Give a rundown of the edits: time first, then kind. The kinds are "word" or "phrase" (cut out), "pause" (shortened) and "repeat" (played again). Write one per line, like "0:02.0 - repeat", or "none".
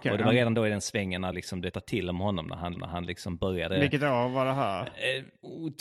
0:01.3 - phrase
0:01.7 - word
0:02.8 - repeat